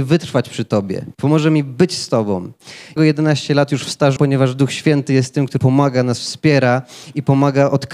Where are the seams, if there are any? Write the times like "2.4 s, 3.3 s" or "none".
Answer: 1.1 s, 3.0 s, 4.2 s, 5.6 s